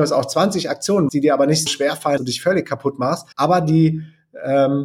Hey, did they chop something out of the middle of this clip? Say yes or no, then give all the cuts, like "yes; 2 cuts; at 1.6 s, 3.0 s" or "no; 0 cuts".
yes; 4 cuts; at 1.1 s, 1.7 s, 2.2 s, 3.3 s